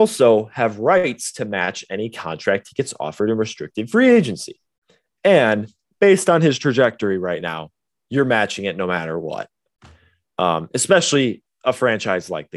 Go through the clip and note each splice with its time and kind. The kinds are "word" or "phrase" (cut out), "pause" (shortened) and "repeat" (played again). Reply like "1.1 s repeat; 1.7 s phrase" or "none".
none